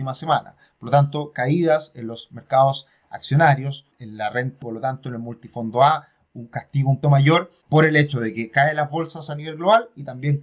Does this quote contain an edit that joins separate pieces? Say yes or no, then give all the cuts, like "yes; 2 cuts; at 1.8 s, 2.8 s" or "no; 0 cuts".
yes; 2 cuts; at 4.6 s, 7.0 s